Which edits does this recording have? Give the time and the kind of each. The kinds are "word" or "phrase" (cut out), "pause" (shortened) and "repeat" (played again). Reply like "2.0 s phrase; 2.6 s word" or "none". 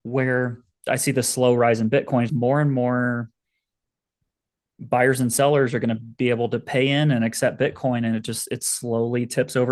2.3 s word